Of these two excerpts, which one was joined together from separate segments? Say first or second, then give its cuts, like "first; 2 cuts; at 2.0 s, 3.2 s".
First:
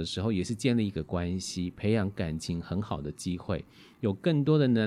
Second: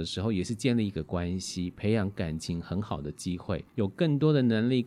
second; 1 cut; at 3.7 s